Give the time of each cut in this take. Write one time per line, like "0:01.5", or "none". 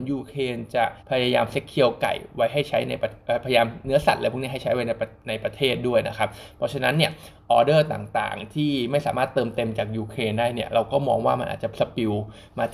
0:01.0